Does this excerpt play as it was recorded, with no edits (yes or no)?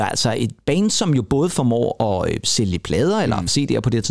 yes